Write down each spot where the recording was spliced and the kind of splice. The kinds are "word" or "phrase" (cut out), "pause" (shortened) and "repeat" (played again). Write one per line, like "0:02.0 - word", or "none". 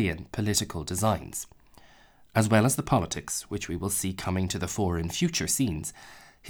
none